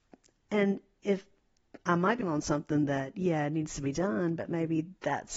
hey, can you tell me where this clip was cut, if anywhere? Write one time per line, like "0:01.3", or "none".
0:02.2

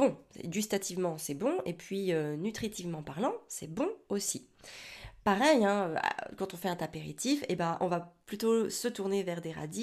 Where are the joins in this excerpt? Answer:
none

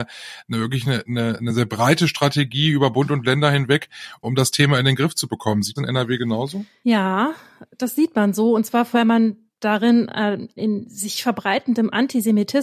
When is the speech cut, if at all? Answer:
0:04.2
0:05.8
0:08.9
0:10.6

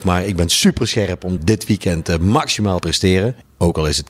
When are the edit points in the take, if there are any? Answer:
0:01.4
0:02.8

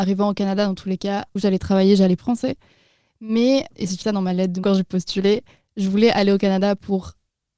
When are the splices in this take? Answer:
0:01.4
0:02.2
0:03.7
0:04.0
0:04.6

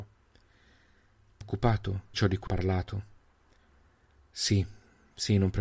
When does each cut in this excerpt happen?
0:01.4
0:02.1
0:02.5

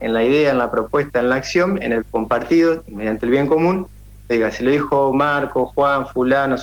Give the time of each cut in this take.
0:02.0
0:04.3

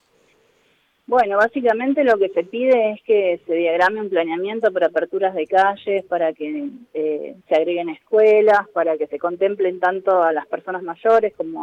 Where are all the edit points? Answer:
0:07.4

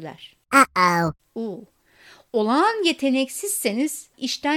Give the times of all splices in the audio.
none

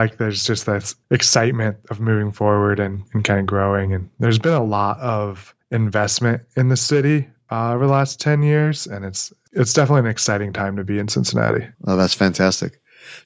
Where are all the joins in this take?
0:01.0
0:04.1
0:05.6
0:11.7

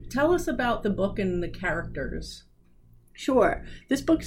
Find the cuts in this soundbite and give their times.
none

